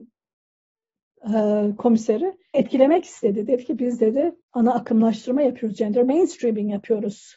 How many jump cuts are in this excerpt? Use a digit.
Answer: 2